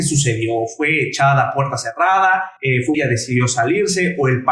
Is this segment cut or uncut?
cut